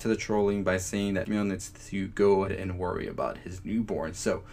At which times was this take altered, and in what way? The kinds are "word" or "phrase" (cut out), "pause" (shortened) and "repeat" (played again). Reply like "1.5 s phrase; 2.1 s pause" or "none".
1.2 s word; 2.5 s word